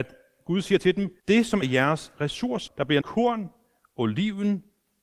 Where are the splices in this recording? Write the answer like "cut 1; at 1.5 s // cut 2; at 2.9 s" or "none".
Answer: cut 1; at 1.2 s // cut 2; at 1.6 s // cut 3; at 2.7 s // cut 4; at 3.0 s